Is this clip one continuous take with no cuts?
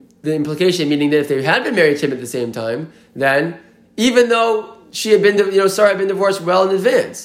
yes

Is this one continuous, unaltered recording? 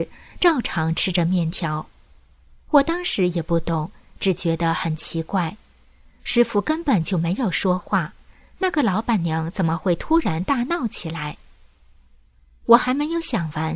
yes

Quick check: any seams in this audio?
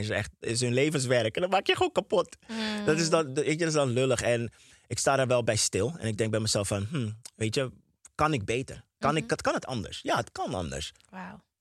no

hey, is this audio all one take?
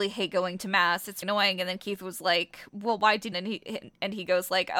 no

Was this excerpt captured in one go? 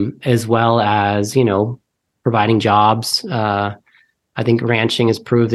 yes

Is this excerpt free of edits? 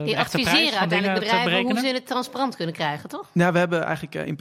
yes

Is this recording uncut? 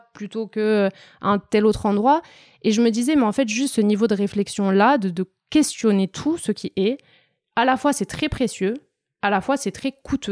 yes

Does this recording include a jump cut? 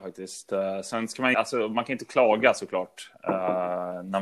yes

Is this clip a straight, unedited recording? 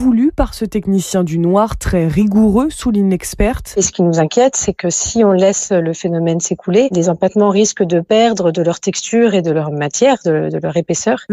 yes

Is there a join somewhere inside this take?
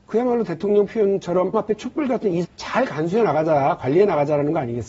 yes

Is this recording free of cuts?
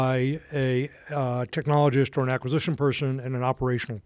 yes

